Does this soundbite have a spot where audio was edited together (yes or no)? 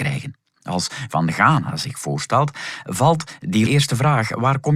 yes